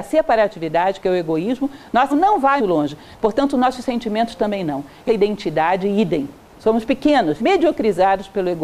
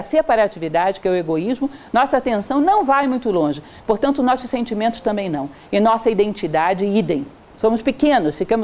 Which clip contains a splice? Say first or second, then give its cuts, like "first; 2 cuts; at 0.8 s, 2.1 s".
first; 4 cuts; at 2.1 s, 2.6 s, 5.1 s, 7.4 s